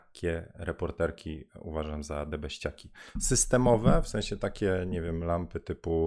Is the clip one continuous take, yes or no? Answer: yes